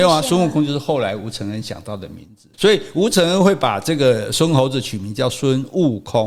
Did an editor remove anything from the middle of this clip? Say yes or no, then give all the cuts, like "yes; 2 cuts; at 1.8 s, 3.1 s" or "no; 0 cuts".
yes; 1 cut; at 2.5 s